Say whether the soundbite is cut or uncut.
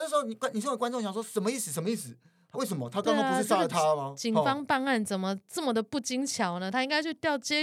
cut